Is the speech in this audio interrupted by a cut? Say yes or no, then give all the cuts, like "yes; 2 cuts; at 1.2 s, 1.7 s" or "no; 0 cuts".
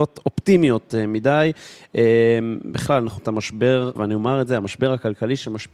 yes; 2 cuts; at 3.2 s, 4.0 s